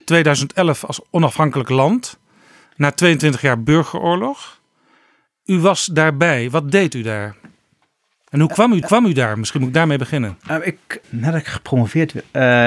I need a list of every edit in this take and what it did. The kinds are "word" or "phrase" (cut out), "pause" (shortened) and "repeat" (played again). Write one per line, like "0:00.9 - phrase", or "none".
0:01.1 - pause
0:08.8 - repeat
0:10.4 - pause
0:11.0 - word